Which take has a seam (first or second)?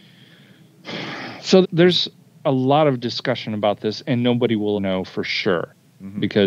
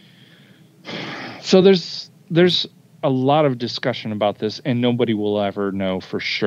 first